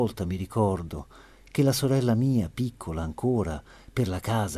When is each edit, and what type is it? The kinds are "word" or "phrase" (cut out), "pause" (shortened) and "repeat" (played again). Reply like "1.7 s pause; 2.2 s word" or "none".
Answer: none